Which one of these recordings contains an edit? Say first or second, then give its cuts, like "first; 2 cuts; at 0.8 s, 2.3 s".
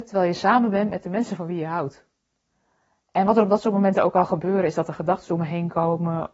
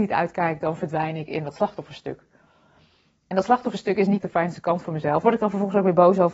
second; 2 cuts; at 4.2 s, 5.2 s